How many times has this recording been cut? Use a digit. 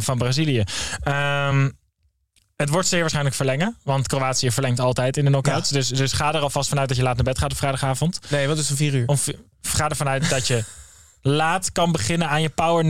0